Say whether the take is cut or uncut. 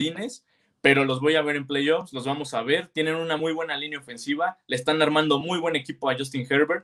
uncut